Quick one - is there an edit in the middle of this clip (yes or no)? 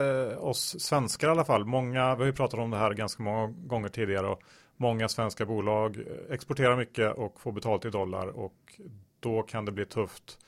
no